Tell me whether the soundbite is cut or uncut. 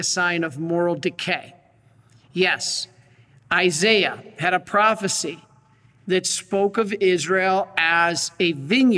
uncut